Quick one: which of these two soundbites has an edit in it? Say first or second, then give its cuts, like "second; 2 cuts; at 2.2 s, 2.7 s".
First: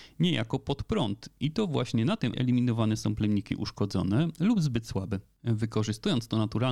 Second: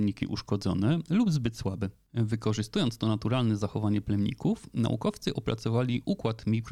first; 1 cut; at 2.3 s